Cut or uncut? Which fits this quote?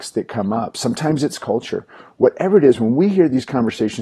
uncut